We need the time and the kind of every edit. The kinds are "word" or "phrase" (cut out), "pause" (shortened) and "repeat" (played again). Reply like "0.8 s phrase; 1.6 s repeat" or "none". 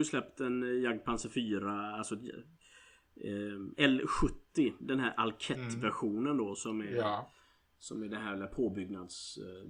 none

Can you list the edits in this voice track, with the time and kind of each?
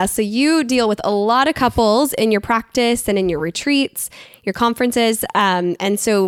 none

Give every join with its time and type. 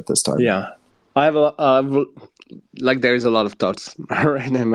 none

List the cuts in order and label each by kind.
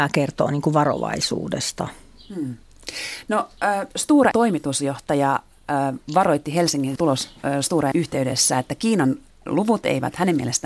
4.3 s word; 7.0 s phrase; 7.9 s phrase

